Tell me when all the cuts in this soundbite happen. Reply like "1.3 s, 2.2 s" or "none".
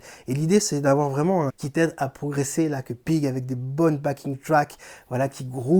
1.5 s